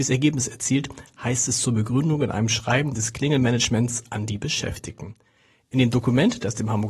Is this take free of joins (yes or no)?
yes